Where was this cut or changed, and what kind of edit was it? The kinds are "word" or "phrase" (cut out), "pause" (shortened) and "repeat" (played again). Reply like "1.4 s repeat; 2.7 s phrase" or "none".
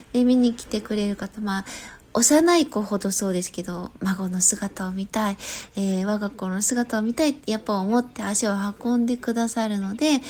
2.0 s pause